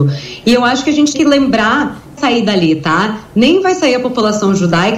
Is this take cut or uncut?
cut